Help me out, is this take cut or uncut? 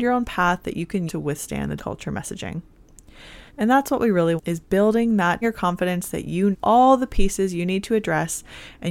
cut